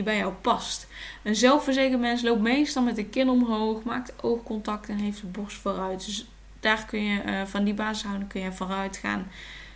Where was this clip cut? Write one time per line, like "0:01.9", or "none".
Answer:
none